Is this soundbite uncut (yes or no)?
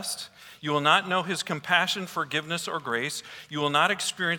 yes